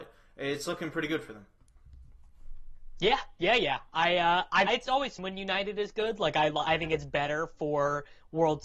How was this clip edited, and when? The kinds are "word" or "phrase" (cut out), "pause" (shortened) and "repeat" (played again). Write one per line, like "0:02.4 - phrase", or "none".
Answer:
0:04.7 - phrase
0:05.2 - word